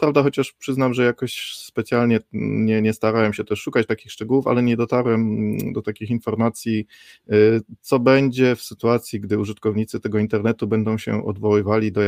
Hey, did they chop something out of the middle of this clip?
no; 0 cuts

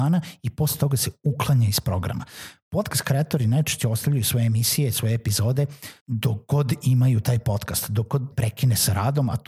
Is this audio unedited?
no; 2 cuts; at 6.0 s, 8.3 s

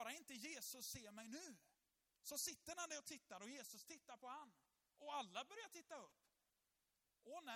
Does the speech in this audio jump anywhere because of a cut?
no; 0 cuts

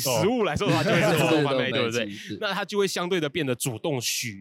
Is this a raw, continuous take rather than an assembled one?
no; 1 cut; at 1.7 s

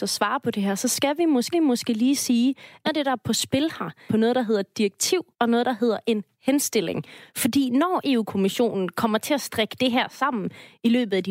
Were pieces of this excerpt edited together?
yes; 4 cuts; at 1.5 s, 2.9 s, 4.1 s, 5.3 s

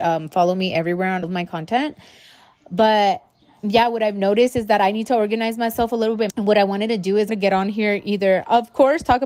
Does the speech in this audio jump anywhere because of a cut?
yes; 3 cuts; at 1.2 s, 6.3 s, 7.3 s

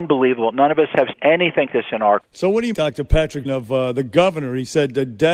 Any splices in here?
yes; 5 cuts; at 1.1 s, 1.7 s, 2.2 s, 2.7 s, 3.4 s

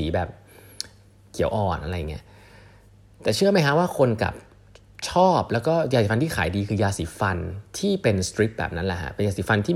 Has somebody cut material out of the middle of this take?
no; 0 cuts

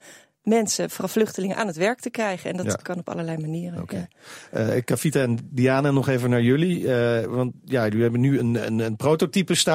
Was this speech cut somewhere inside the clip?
no; 0 cuts

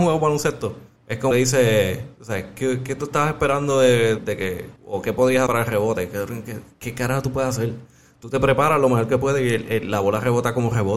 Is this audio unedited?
no; 5 cuts; at 1.0 s, 1.3 s, 4.2 s, 4.8 s, 5.5 s

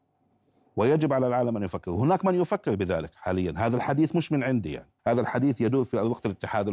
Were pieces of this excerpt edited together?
yes; 1 cut; at 5.0 s

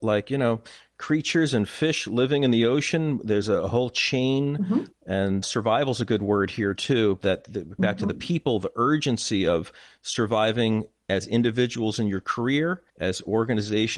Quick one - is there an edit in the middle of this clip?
yes; 3 cuts; at 5.4 s, 7.8 s, 12.9 s

